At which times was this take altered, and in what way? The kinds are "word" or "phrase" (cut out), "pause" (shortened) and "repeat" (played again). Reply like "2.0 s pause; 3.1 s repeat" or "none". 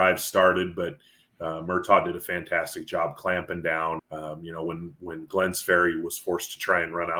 4.0 s word